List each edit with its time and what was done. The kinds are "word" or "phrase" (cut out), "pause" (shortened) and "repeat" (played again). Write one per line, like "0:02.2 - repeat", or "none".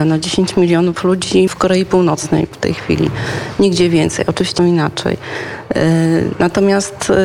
0:01.5 - phrase
0:02.5 - word
0:04.6 - word